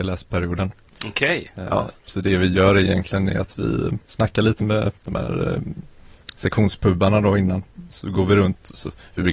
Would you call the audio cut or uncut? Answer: cut